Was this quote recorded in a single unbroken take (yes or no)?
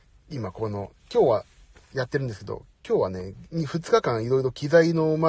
yes